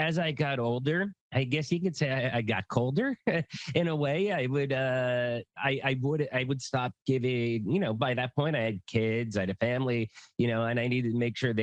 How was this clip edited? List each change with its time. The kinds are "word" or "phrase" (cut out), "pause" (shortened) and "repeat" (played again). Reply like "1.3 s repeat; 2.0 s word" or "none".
1.2 s pause